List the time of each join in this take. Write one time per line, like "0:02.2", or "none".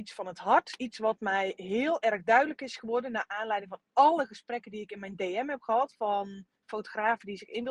0:06.5